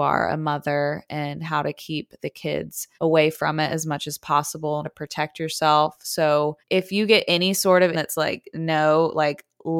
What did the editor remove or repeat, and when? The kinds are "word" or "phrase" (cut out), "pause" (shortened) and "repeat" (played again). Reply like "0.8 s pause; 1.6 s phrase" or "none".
2.9 s pause; 4.8 s word; 6.6 s pause; 7.9 s word